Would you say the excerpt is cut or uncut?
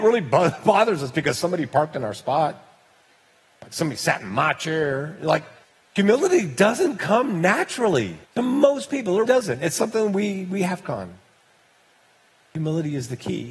cut